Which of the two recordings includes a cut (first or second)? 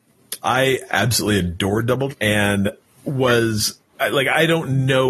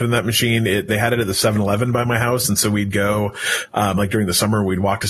first